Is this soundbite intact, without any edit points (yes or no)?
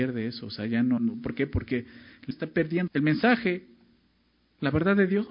no